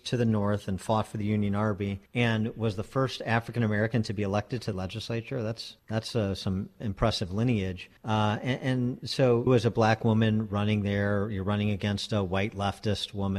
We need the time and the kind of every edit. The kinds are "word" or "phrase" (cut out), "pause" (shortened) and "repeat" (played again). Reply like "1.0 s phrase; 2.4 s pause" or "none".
2.1 s pause; 4.7 s phrase; 5.8 s pause; 8.0 s pause; 9.5 s phrase

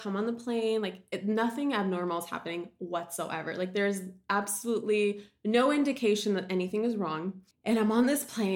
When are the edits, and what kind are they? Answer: 7.5 s pause

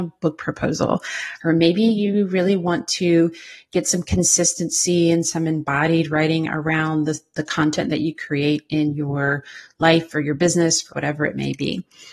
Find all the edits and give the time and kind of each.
10.9 s word

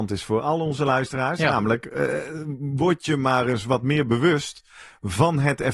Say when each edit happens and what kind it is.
none

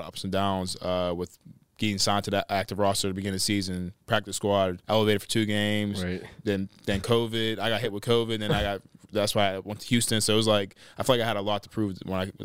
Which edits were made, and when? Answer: 4.8 s pause

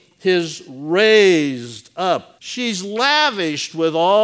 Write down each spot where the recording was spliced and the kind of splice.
2.4 s pause

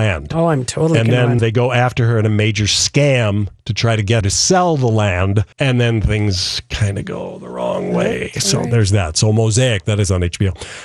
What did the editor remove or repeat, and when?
1.4 s word; 4.2 s word; 5.5 s pause

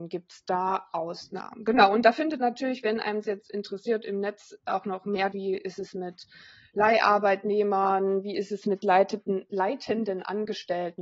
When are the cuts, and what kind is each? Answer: 2.4 s word; 3.2 s word; 5.3 s word

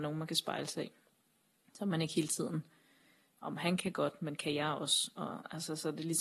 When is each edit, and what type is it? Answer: none

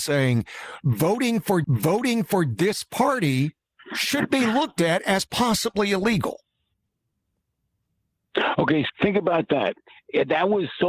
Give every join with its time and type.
1.6 s repeat; 8.9 s word

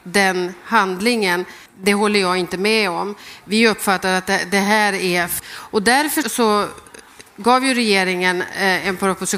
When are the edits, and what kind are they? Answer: 1.7 s pause; 5.4 s word; 6.2 s word; 7.3 s pause

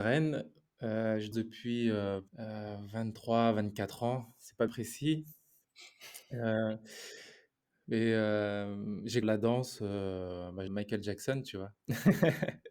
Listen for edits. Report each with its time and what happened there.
1.3 s word; 2.3 s pause; 4.7 s word; 9.2 s word; 10.7 s phrase

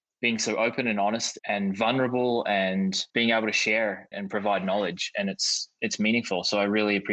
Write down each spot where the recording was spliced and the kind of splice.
1.4 s word; 3.1 s pause; 4.1 s phrase

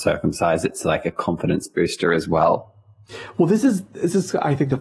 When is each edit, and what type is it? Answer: none

